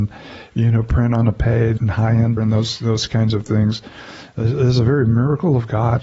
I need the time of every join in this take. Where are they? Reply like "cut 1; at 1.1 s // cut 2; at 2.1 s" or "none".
cut 1; at 1.8 s // cut 2; at 2.4 s

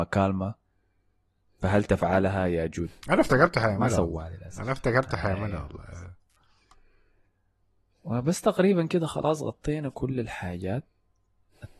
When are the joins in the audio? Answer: none

